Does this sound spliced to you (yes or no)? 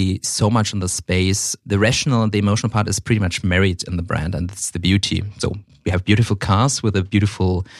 no